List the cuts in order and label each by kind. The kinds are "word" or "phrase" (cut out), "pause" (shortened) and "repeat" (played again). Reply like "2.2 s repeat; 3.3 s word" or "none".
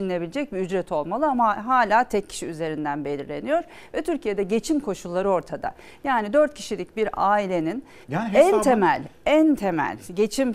8.0 s pause